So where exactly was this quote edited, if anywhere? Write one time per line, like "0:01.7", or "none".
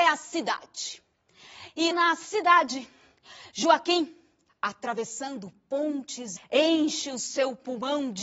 0:01.9
0:04.5
0:06.4